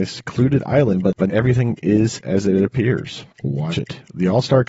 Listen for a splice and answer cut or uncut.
cut